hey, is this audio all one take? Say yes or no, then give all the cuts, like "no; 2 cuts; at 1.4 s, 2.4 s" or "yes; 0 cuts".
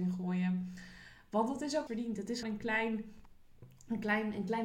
no; 2 cuts; at 1.9 s, 2.4 s